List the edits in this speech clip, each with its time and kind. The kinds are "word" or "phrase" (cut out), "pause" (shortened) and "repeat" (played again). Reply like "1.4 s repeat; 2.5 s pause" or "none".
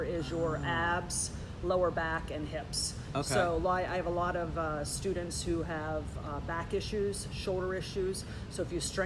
none